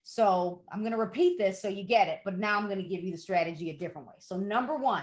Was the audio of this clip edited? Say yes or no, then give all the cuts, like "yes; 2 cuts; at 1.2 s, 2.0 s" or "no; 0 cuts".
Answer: no; 0 cuts